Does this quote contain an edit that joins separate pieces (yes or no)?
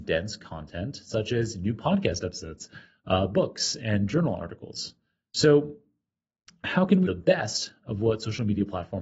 yes